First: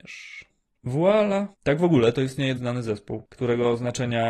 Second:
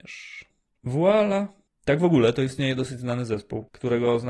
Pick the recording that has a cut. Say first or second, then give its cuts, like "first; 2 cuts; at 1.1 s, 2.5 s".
first; 2 cuts; at 1.5 s, 2.6 s